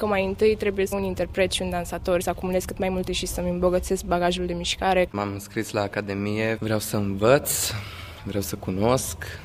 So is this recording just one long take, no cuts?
no; 4 cuts; at 0.9 s, 2.2 s, 3.1 s, 6.6 s

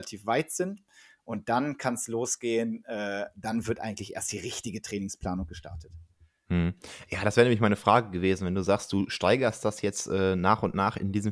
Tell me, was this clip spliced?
no; 0 cuts

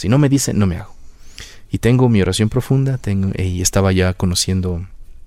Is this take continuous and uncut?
yes; 0 cuts

